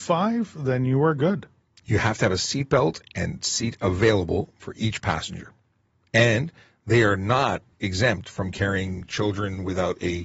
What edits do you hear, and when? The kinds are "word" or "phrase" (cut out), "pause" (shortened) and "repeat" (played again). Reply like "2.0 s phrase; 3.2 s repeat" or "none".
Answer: none